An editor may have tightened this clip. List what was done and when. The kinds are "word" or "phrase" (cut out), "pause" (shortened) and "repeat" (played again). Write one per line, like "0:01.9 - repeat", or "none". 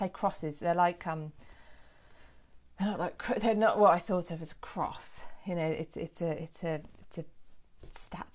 none